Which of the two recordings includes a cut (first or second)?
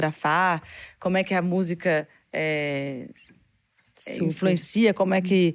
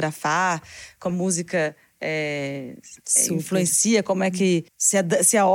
second